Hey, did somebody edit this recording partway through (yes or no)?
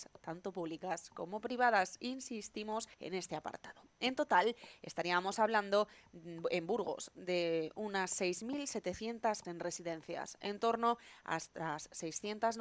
yes